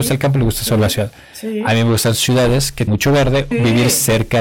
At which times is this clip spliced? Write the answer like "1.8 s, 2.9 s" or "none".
2.9 s, 3.5 s